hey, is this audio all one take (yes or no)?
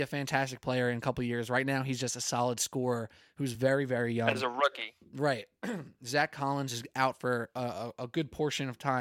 yes